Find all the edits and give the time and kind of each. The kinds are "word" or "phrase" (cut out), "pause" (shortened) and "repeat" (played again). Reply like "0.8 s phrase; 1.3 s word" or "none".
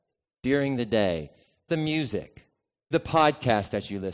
1.7 s word; 2.9 s word